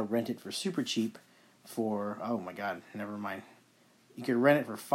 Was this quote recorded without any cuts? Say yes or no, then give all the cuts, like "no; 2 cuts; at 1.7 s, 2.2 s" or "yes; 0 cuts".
yes; 0 cuts